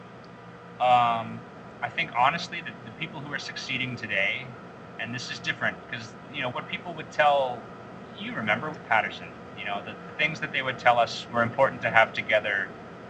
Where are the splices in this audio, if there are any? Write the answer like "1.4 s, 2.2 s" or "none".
6.5 s, 8.7 s, 11.3 s